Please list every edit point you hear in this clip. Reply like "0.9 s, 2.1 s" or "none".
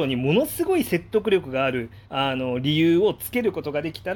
2.0 s